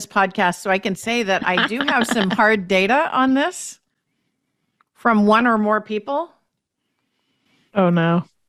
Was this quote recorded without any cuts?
yes; 0 cuts

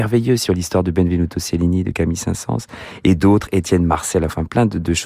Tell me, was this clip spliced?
no; 0 cuts

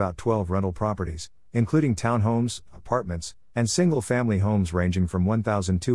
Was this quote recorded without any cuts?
yes; 0 cuts

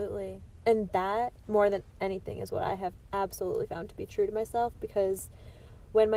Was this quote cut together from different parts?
yes; 1 cut; at 1.4 s

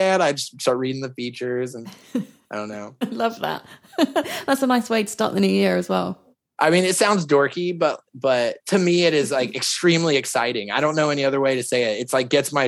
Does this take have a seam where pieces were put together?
yes; 1 cut; at 6.3 s

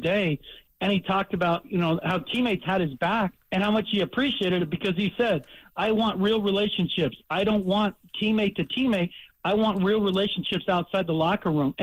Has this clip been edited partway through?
yes; 1 cut; at 3.4 s

